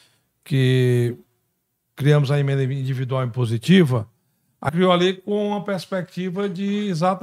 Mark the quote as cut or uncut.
cut